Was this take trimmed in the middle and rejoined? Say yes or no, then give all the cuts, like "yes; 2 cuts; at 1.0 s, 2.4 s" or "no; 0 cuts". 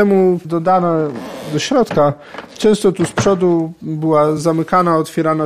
no; 0 cuts